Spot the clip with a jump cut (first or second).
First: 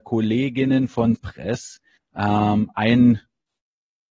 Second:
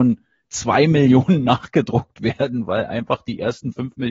first